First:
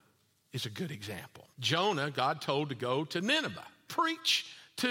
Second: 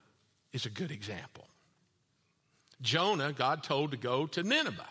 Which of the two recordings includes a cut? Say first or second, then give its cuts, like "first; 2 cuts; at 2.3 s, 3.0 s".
first; 2 cuts; at 1.5 s, 3.9 s